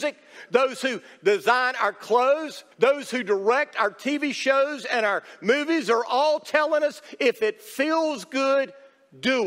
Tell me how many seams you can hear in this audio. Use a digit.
1